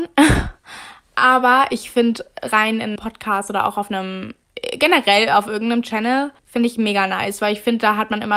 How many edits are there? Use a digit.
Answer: 3